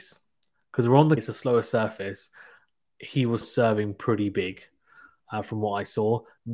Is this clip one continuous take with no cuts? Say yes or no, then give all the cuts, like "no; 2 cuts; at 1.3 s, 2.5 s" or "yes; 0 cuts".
no; 2 cuts; at 1.2 s, 3.4 s